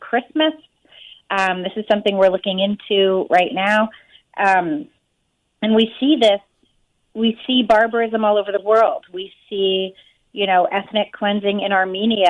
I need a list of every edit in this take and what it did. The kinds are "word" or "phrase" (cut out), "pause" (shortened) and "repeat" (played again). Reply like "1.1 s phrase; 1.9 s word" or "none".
none